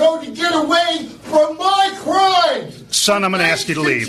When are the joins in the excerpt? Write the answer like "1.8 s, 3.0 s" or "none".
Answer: none

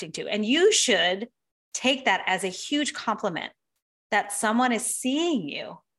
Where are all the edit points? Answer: none

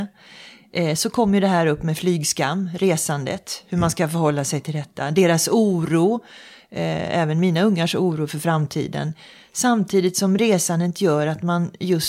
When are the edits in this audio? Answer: none

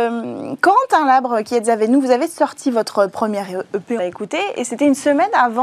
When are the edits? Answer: 4.0 s

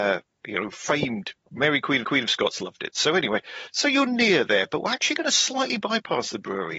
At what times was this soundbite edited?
2.0 s

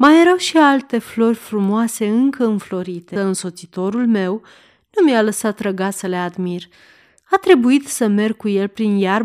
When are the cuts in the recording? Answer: 3.2 s

